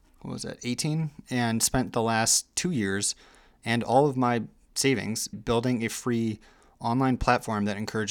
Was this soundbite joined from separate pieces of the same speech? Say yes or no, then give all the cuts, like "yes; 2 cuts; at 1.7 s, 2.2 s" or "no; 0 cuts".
yes; 1 cut; at 5.3 s